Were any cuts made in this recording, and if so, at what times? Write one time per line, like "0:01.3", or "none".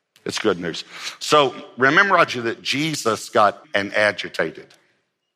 0:02.3
0:03.6

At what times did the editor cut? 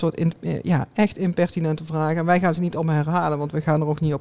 none

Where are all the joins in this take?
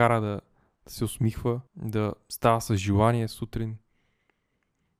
0:01.7

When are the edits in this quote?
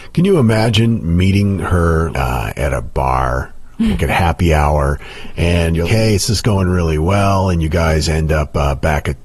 0:02.1
0:04.0
0:05.8

